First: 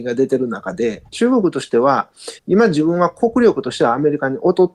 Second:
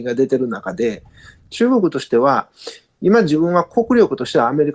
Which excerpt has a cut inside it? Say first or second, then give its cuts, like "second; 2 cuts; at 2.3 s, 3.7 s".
first; 2 cuts; at 1.1 s, 2.4 s